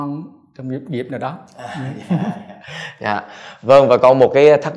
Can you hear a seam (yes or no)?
yes